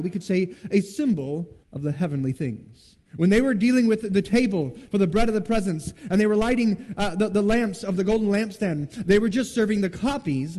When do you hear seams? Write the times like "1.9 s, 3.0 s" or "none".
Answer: 1.6 s, 3.1 s